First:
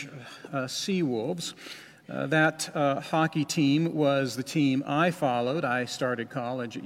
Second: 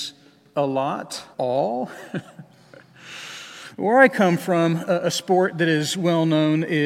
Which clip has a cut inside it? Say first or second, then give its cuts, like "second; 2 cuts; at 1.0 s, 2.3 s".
second; 1 cut; at 1.3 s